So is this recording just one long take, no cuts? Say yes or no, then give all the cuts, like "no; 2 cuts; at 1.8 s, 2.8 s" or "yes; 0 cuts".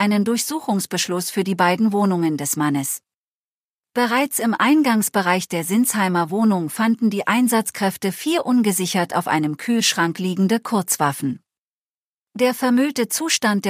yes; 0 cuts